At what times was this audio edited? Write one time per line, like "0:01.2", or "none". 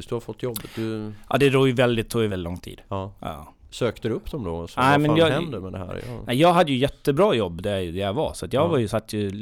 0:02.3